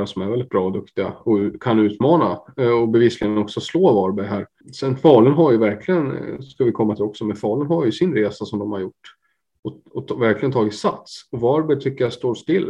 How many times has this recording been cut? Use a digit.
0